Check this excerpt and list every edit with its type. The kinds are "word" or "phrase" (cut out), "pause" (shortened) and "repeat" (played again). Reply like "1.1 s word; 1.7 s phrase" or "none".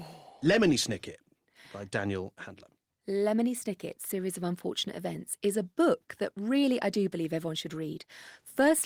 2.9 s pause